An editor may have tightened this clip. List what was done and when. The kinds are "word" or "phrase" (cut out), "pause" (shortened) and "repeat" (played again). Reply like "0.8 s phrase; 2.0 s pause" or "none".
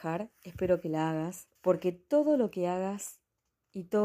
1.6 s pause